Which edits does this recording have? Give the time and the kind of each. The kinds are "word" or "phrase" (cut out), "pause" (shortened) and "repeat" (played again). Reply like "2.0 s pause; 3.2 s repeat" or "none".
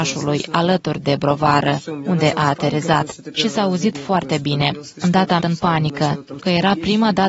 5.4 s word; 6.4 s word